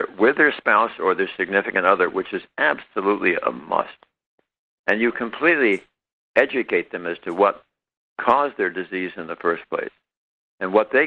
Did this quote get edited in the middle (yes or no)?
no